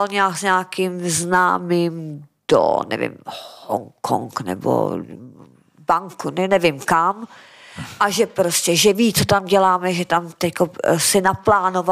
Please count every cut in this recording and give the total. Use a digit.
0